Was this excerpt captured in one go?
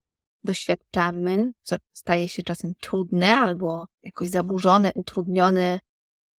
no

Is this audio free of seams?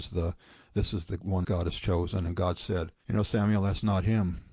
no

